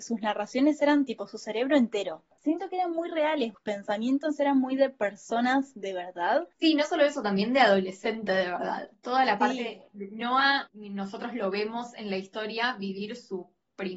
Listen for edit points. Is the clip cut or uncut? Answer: uncut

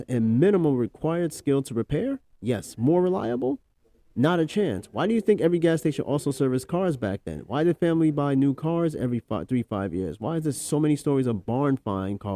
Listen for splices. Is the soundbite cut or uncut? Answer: uncut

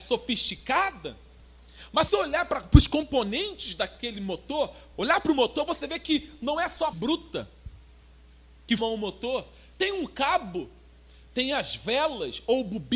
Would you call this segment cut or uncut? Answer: cut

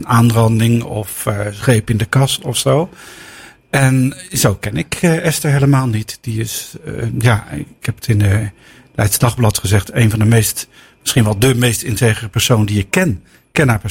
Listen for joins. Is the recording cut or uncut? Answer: uncut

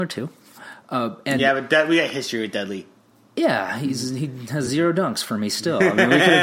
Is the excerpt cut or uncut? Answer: uncut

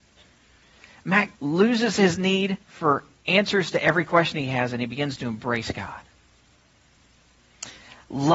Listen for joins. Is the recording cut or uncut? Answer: cut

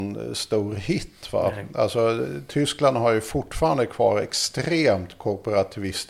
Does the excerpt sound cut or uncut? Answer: uncut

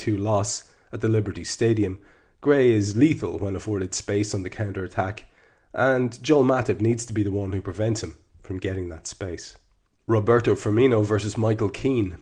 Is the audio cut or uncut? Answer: uncut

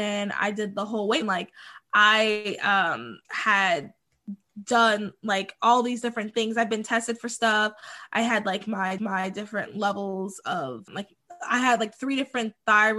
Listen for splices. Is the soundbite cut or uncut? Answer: cut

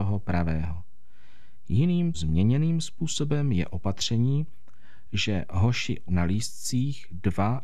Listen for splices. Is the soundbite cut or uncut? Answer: cut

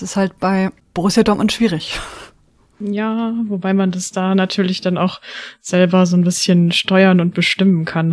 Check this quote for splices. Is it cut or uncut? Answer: uncut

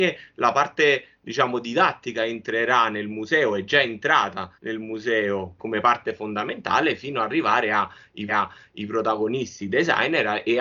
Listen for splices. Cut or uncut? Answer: cut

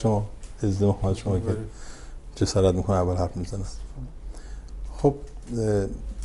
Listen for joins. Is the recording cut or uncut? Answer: uncut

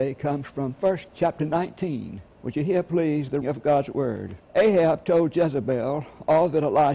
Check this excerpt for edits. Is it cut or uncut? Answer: cut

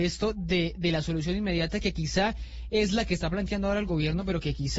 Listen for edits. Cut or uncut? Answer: uncut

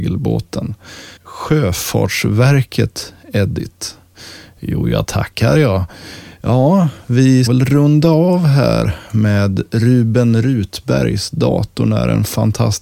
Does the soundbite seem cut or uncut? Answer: cut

